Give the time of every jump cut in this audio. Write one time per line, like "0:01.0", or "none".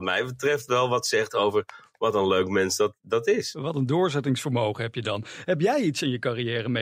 none